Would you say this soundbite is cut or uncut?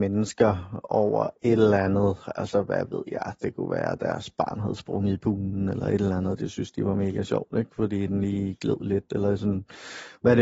uncut